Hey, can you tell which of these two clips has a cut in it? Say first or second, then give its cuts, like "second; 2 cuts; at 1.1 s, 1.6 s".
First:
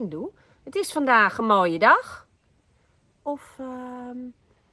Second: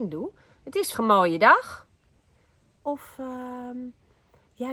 second; 1 cut; at 0.9 s